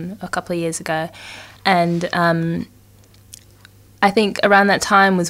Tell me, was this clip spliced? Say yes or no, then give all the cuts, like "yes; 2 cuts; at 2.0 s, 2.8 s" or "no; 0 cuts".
yes; 1 cut; at 1.6 s